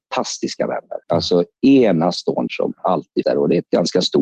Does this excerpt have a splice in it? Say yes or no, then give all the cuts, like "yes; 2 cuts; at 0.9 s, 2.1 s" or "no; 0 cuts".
yes; 3 cuts; at 1.0 s, 2.5 s, 3.2 s